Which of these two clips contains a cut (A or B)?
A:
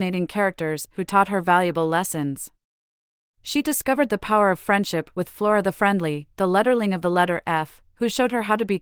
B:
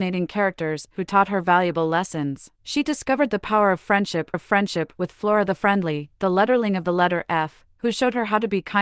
B